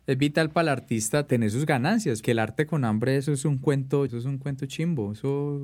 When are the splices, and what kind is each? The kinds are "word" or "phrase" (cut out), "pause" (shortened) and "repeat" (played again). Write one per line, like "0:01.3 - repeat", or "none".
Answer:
0:01.3 - word
0:02.2 - word
0:04.1 - word